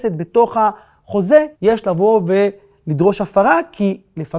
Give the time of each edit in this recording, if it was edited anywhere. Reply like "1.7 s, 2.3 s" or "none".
1.5 s